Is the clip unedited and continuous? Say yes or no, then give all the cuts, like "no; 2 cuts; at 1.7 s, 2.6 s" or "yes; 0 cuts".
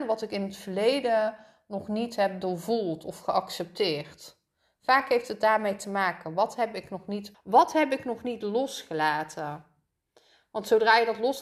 no; 1 cut; at 7.3 s